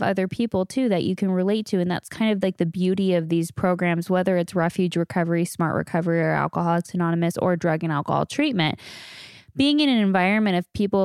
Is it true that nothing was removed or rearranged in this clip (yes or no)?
yes